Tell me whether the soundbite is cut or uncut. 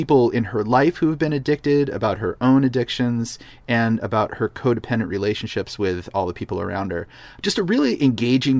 cut